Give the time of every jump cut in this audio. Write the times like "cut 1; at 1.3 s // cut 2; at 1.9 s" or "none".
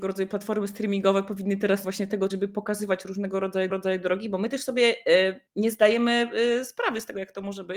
cut 1; at 1.8 s // cut 2; at 2.3 s // cut 3; at 3.7 s // cut 4; at 5.5 s